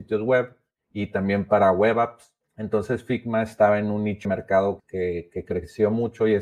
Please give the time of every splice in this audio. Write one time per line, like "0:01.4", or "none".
0:04.2
0:04.8